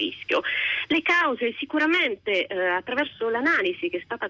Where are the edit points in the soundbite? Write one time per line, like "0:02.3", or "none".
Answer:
none